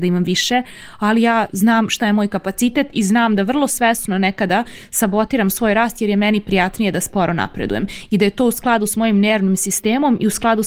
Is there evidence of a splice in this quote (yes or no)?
no